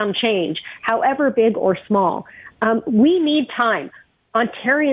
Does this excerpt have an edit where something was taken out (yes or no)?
no